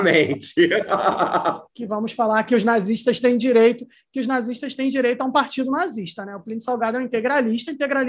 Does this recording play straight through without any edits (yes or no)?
yes